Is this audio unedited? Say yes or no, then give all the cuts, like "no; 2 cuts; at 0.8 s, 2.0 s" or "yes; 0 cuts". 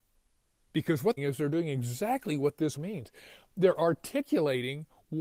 no; 2 cuts; at 1.2 s, 2.8 s